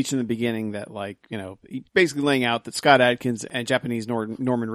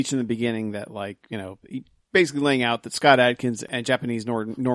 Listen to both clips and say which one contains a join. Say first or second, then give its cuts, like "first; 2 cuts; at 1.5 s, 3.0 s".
first; 1 cut; at 1.9 s